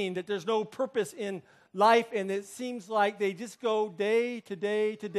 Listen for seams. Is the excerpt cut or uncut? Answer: uncut